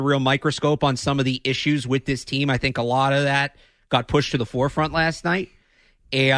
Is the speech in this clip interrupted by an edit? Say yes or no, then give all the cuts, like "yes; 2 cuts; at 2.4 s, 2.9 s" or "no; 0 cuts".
no; 0 cuts